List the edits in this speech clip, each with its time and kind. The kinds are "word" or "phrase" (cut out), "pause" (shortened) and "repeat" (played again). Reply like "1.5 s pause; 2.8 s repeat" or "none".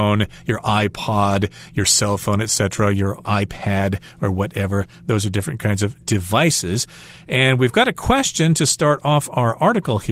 none